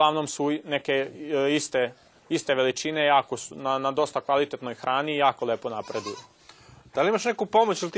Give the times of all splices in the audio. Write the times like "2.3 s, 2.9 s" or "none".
none